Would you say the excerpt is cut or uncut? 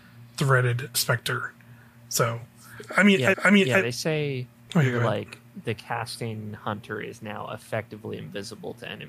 cut